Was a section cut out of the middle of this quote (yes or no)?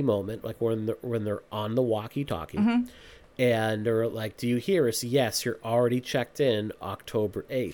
no